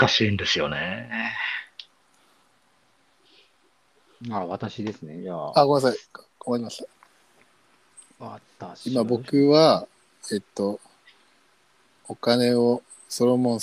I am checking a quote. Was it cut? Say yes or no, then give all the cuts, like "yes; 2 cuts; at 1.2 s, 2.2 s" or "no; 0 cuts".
no; 0 cuts